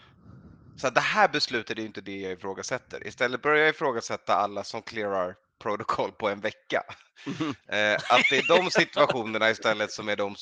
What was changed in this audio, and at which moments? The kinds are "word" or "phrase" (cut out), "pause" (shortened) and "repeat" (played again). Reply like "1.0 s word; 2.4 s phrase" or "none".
none